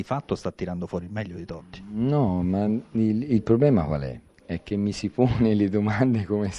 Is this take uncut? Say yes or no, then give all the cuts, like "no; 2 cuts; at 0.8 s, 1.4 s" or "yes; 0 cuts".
yes; 0 cuts